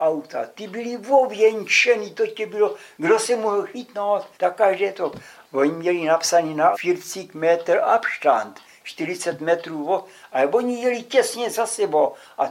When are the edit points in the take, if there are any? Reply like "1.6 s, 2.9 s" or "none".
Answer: 4.3 s, 6.7 s